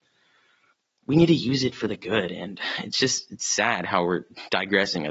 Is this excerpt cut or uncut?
uncut